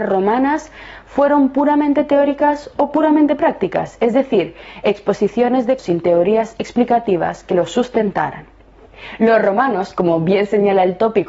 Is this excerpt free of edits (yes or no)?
no